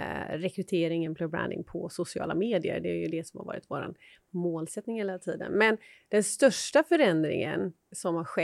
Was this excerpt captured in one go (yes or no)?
yes